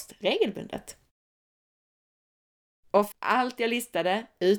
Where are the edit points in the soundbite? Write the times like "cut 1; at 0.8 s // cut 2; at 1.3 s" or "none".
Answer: cut 1; at 3.1 s